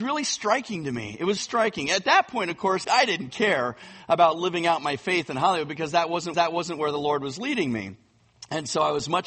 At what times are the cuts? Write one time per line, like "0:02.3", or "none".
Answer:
0:01.4
0:02.8
0:06.3